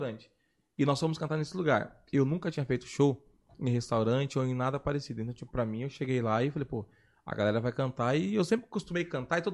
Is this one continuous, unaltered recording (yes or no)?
yes